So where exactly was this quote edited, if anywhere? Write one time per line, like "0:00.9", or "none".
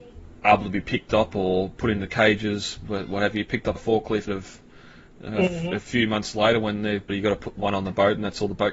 0:03.7
0:04.3
0:07.1